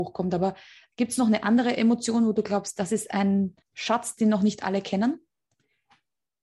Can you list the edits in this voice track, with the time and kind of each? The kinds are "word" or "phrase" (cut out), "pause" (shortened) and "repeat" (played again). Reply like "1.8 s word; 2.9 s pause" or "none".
3.6 s pause